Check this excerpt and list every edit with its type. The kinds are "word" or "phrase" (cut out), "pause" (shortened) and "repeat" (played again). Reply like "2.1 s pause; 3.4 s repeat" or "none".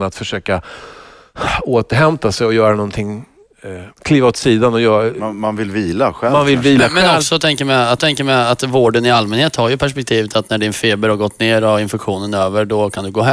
3.9 s pause; 8.0 s repeat